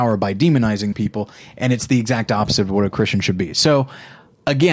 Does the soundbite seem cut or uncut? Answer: cut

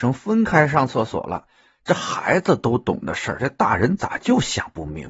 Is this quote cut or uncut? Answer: uncut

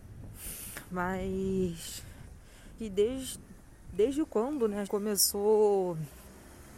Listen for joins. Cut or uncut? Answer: cut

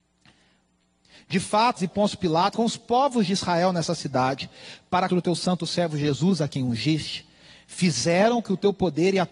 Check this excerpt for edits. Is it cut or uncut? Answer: cut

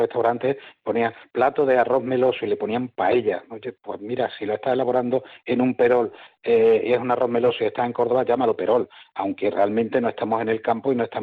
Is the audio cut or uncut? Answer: uncut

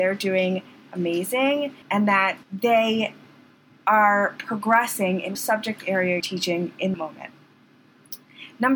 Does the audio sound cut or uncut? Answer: cut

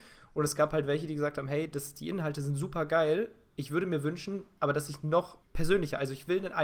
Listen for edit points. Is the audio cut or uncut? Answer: cut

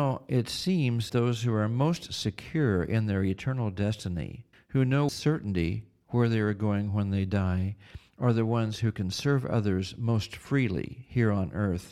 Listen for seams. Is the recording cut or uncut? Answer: cut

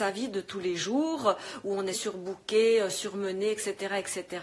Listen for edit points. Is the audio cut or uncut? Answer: cut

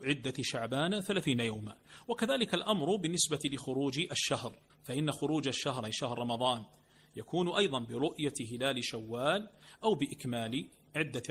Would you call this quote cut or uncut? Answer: cut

